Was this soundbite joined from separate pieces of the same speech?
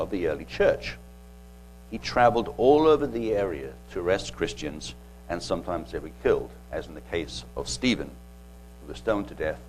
no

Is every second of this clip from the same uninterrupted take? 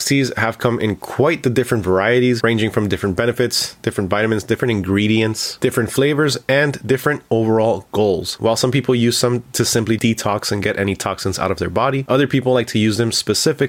no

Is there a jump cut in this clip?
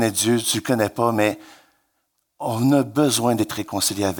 no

